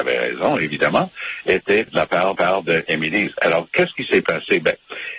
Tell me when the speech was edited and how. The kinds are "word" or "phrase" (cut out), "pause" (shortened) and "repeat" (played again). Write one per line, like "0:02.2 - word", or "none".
0:01.9 - word
0:02.4 - repeat